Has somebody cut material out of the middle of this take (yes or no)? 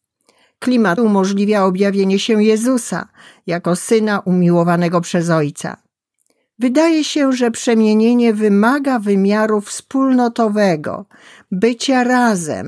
yes